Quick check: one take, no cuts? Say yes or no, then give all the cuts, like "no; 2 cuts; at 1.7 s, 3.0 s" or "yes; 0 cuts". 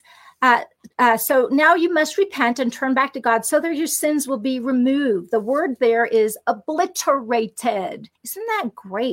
no; 2 cuts; at 0.9 s, 8.2 s